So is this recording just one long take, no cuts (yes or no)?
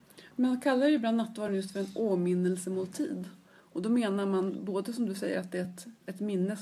yes